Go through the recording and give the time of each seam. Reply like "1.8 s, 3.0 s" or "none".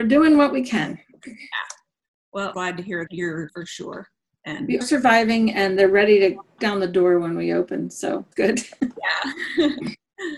2.5 s, 3.1 s, 3.5 s, 4.8 s, 6.6 s, 8.3 s